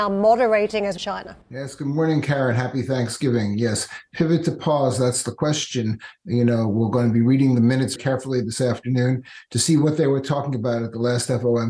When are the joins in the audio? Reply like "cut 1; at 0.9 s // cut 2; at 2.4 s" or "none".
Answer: cut 1; at 1.0 s // cut 2; at 1.4 s // cut 3; at 8.0 s